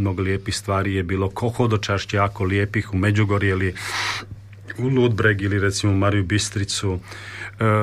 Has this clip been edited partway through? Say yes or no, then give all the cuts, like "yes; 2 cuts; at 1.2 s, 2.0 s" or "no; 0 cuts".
no; 0 cuts